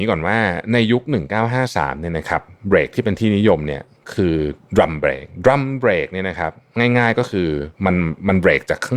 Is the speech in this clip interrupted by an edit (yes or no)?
yes